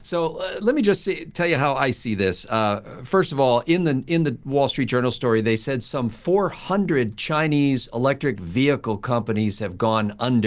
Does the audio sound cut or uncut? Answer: uncut